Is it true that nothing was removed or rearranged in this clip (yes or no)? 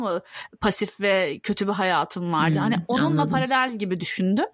yes